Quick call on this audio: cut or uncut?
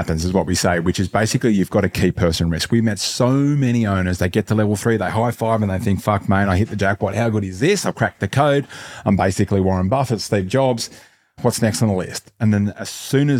uncut